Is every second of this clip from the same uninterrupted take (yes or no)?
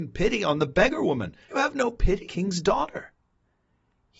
no